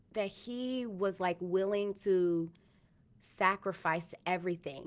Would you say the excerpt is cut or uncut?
uncut